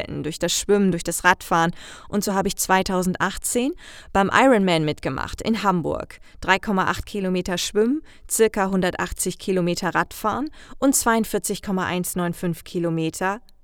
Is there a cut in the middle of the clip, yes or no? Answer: no